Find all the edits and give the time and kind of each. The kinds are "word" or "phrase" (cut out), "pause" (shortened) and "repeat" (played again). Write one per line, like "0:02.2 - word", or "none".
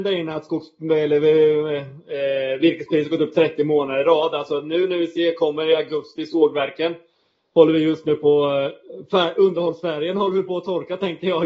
none